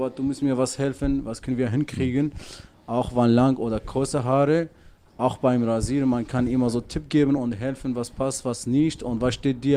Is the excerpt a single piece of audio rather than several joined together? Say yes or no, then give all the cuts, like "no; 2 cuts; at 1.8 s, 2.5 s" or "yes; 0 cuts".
yes; 0 cuts